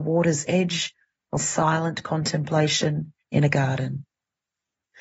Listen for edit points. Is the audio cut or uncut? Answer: cut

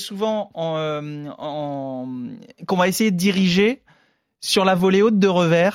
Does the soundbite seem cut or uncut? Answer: uncut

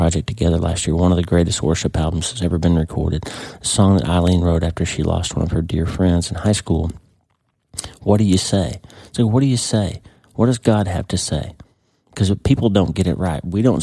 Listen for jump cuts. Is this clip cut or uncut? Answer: uncut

